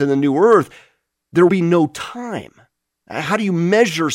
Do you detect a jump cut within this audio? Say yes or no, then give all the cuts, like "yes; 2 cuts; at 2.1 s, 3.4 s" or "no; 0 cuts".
yes; 1 cut; at 1.5 s